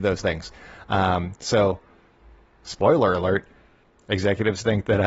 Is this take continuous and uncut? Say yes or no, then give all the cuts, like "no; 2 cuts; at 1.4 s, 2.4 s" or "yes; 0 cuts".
yes; 0 cuts